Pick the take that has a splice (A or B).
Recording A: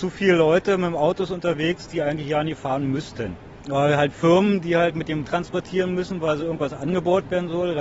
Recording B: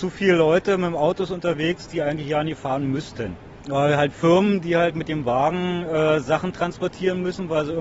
A